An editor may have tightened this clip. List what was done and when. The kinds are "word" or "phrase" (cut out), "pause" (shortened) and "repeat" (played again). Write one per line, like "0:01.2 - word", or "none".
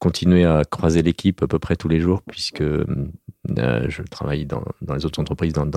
none